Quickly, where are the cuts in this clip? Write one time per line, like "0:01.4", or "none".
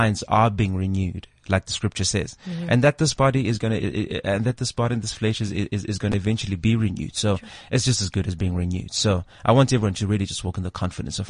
none